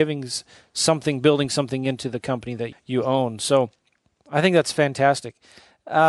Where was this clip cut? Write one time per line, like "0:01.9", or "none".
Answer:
0:02.7